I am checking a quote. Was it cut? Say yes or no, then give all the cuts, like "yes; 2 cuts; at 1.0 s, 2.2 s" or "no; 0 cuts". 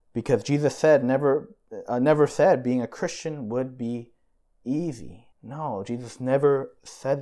yes; 1 cut; at 5.3 s